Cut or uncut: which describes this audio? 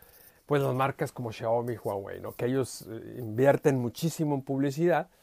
uncut